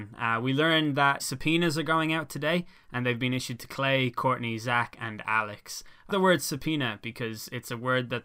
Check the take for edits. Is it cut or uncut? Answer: cut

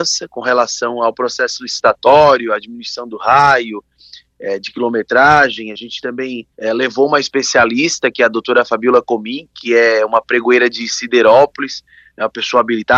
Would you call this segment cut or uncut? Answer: cut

